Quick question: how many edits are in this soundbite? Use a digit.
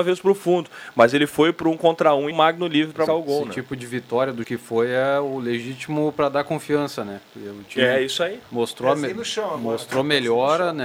3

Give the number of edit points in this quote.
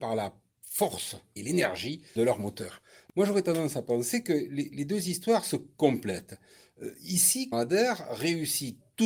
3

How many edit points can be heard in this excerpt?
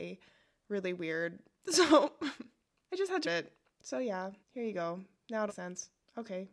4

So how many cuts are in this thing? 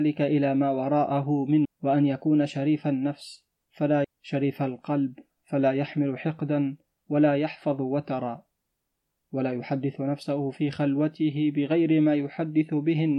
2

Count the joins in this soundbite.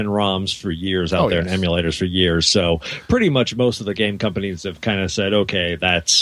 0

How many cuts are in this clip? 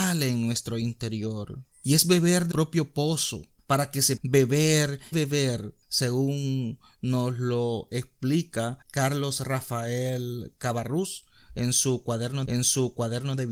7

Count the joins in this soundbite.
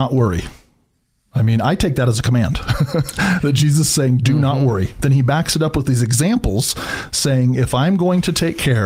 0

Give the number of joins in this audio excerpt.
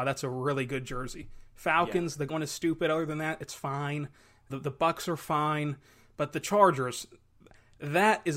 2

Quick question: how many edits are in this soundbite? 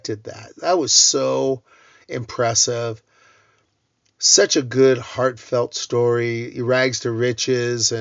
0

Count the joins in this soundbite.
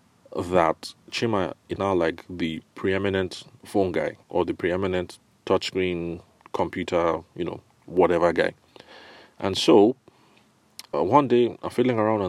4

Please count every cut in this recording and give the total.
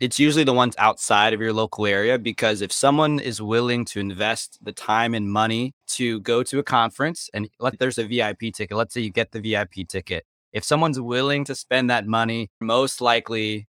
3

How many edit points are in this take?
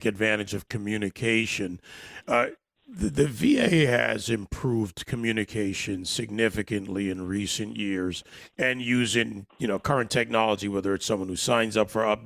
0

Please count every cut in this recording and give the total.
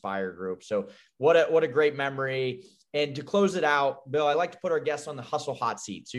0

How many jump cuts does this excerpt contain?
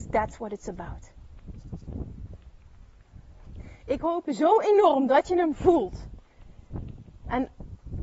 0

